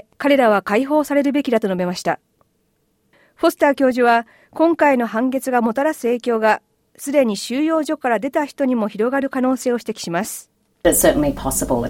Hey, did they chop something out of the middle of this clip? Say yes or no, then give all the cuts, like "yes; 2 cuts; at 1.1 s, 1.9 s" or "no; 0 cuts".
no; 0 cuts